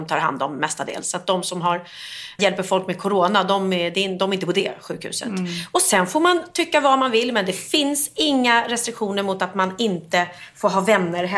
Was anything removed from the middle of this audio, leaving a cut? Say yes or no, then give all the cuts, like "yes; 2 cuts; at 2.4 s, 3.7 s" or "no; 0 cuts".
yes; 1 cut; at 2.4 s